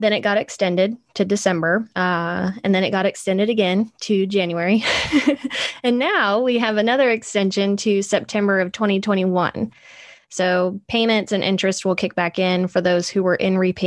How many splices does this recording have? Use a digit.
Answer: 1